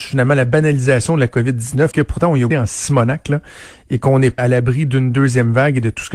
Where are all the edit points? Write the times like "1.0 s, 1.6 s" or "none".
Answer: 1.9 s, 2.5 s, 4.4 s